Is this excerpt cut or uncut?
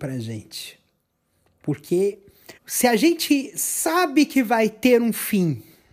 cut